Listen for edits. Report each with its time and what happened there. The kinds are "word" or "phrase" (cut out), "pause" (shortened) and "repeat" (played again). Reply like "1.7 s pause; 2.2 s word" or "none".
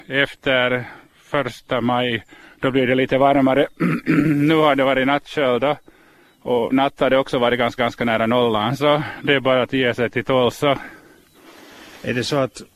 2.4 s pause; 6.7 s word; 7.8 s repeat